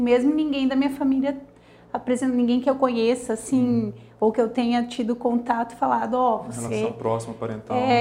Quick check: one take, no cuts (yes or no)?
yes